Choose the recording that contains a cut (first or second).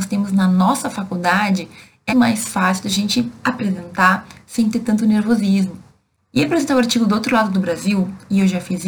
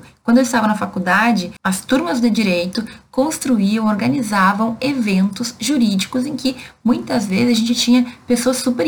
first